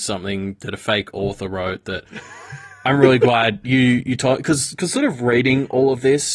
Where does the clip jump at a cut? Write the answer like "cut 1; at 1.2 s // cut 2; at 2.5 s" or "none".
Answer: none